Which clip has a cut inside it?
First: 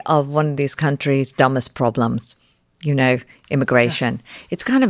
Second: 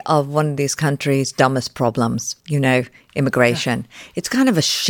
second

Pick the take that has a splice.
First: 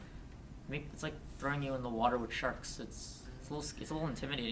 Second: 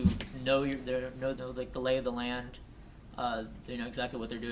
second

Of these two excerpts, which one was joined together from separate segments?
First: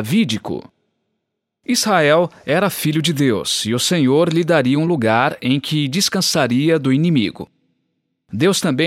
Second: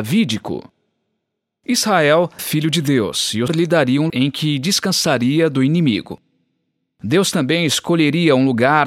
second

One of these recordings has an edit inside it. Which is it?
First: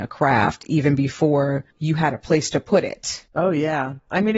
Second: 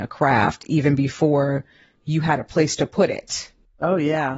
first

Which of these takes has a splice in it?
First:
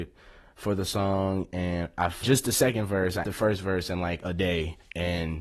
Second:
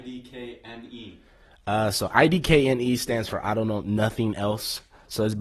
first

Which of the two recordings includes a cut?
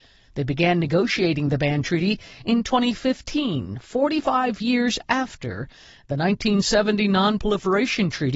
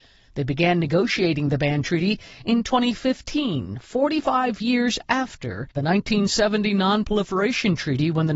second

